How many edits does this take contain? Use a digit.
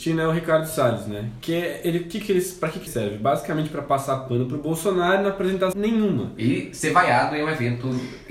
2